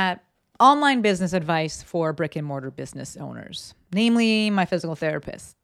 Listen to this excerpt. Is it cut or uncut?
uncut